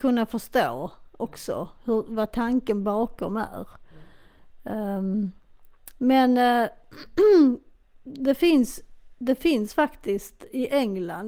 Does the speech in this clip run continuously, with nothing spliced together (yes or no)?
yes